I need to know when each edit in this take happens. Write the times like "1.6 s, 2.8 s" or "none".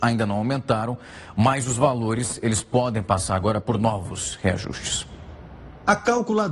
none